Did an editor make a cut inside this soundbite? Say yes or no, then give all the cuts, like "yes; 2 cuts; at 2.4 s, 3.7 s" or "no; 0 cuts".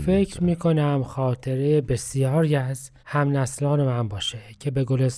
yes; 1 cut; at 3.0 s